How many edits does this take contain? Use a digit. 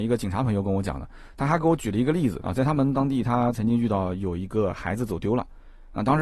1